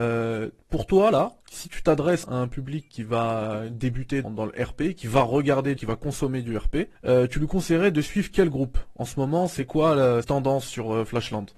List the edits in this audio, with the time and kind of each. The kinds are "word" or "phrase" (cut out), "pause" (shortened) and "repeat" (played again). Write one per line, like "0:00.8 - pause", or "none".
0:01.4 - pause
0:02.2 - word
0:02.9 - word
0:04.2 - word
0:05.8 - phrase
0:06.9 - pause
0:10.2 - phrase